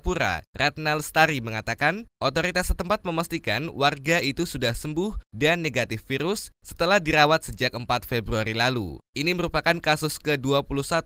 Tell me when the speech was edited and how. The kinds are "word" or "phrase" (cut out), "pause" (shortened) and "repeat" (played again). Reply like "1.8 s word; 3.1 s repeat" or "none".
4.2 s word